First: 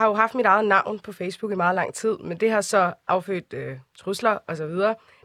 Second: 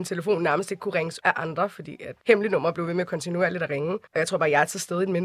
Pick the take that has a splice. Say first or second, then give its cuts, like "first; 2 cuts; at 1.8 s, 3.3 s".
second; 3 cuts; at 1.2 s, 2.2 s, 4.1 s